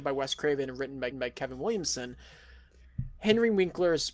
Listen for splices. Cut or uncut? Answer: cut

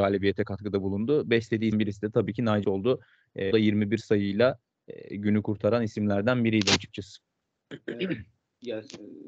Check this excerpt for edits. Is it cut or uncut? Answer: cut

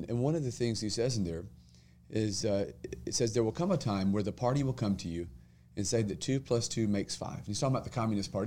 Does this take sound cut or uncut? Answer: uncut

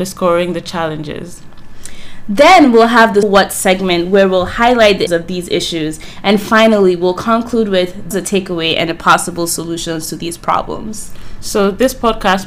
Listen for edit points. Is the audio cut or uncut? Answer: cut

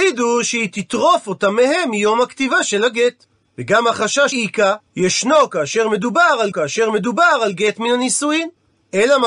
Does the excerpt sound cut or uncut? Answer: cut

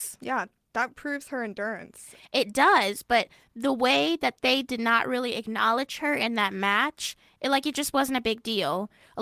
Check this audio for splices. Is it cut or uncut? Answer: uncut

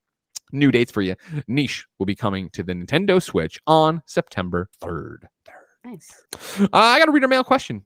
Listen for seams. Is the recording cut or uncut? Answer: cut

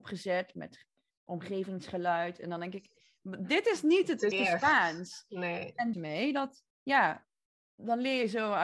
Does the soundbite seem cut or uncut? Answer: cut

